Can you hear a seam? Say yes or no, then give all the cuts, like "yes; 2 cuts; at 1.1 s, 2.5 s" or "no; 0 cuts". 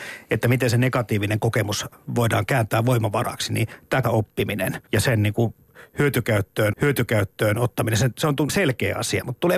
yes; 4 cuts; at 4.0 s, 4.9 s, 6.7 s, 8.5 s